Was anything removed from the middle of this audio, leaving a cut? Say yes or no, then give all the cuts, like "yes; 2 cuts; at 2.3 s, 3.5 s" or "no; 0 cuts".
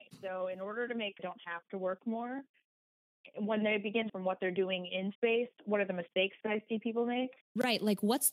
yes; 5 cuts; at 1.2 s, 4.1 s, 5.1 s, 5.6 s, 7.4 s